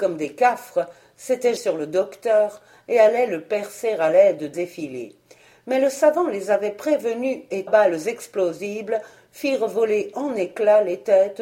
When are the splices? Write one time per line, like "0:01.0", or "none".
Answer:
0:01.6
0:04.5
0:07.7